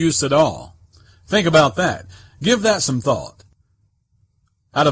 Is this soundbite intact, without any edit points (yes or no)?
yes